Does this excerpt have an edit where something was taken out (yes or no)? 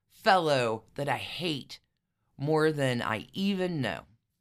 no